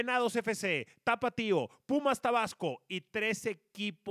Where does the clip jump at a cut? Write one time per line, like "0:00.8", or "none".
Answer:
none